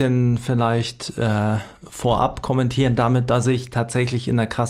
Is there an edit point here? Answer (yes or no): no